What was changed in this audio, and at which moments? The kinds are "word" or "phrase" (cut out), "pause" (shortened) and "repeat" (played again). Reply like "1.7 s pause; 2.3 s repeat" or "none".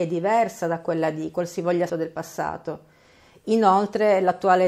1.9 s word